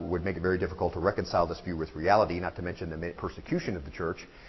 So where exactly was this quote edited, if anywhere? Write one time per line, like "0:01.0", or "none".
0:03.2